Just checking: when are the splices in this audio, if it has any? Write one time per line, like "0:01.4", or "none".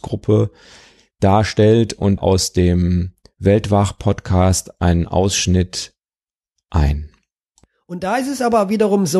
0:02.2